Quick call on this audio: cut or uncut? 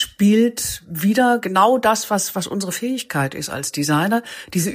uncut